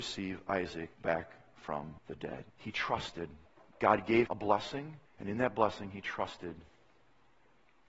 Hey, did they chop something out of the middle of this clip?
yes; 6 cuts; at 0.9 s, 2.0 s, 2.5 s, 3.5 s, 4.3 s, 5.1 s

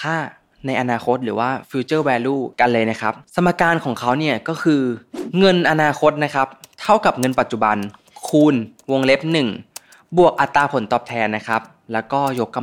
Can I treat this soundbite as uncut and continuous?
no; 1 cut; at 3.2 s

